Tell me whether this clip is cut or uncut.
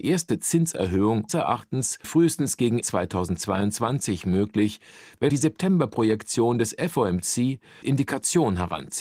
cut